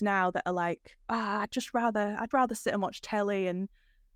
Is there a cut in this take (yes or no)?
yes